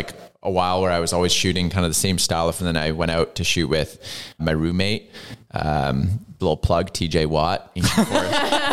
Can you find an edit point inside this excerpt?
yes; 3 cuts; at 2.6 s, 4.4 s, 6.4 s

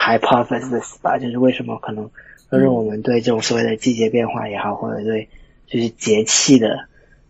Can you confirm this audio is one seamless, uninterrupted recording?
yes; 0 cuts

